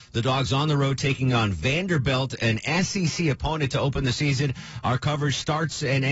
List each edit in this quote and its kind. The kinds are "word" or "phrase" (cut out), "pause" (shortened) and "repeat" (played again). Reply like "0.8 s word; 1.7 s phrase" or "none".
none